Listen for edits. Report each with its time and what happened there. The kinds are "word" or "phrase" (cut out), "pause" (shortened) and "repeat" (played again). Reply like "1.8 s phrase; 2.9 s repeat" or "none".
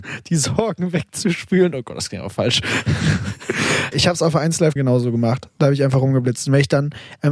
3.9 s word; 4.8 s word